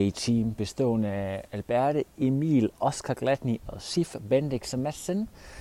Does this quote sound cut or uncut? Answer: uncut